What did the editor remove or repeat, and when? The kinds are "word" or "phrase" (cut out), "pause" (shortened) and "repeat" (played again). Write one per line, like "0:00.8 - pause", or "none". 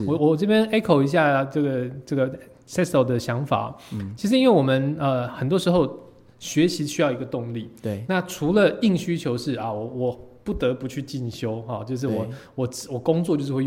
none